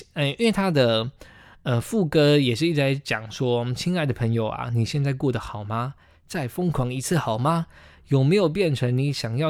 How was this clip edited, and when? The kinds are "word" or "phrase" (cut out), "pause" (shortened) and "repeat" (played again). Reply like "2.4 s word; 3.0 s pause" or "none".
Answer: none